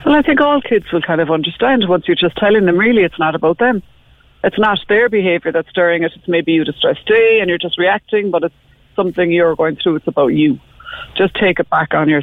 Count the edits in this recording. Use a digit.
0